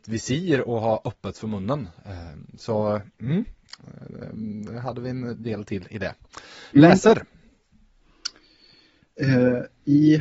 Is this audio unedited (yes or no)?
yes